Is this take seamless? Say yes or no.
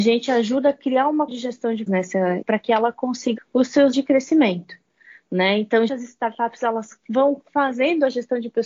no